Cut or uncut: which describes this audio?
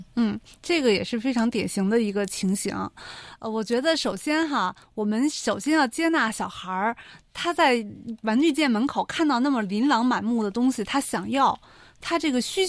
uncut